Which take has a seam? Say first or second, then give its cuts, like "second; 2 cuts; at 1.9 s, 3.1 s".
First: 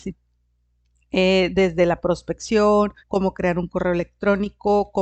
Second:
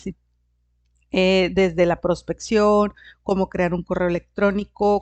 first; 1 cut; at 3.0 s